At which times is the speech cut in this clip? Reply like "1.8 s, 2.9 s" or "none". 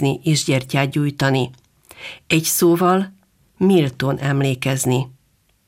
none